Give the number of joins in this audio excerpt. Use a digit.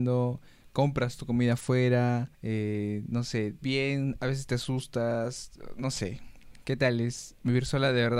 2